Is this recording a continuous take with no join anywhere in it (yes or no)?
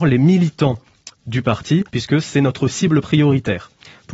no